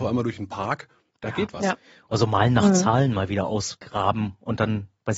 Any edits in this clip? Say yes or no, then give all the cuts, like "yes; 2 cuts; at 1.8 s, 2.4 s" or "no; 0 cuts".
no; 0 cuts